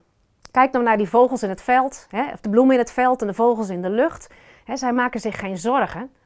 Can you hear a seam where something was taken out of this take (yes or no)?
no